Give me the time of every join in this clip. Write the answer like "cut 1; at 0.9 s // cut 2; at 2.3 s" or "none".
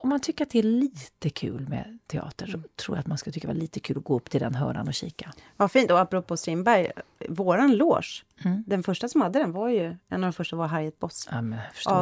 none